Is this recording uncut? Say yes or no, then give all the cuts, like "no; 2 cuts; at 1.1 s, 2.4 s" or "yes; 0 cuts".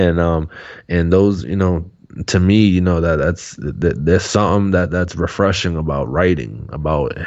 yes; 0 cuts